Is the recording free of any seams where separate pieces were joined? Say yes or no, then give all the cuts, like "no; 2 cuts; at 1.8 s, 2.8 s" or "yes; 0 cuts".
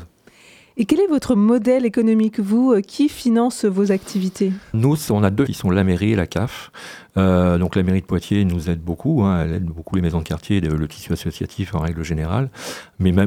no; 2 cuts; at 4.7 s, 5.5 s